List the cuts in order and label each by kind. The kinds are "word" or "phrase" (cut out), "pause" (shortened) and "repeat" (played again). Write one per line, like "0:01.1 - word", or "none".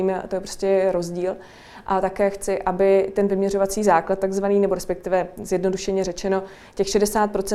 none